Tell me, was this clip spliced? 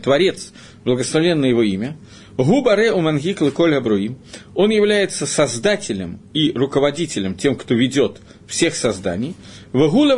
no; 0 cuts

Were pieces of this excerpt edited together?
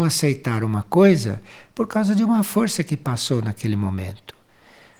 no; 0 cuts

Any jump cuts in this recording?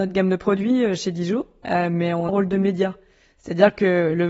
yes; 1 cut; at 2.3 s

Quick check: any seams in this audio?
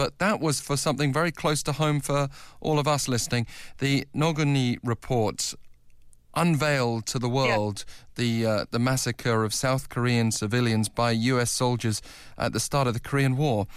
no; 0 cuts

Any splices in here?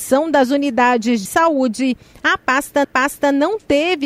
yes; 2 cuts; at 1.3 s, 2.8 s

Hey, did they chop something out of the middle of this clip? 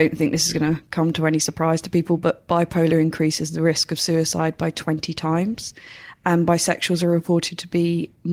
no; 0 cuts

